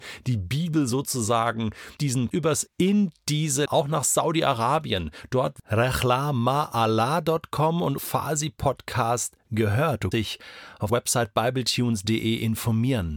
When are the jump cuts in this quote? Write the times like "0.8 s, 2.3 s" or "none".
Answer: 2.0 s, 2.3 s, 2.7 s, 3.7 s, 5.6 s, 8.0 s, 10.1 s, 10.9 s